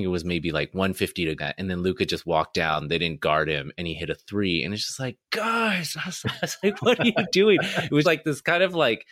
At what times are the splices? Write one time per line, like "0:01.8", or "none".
0:01.4
0:06.2
0:08.0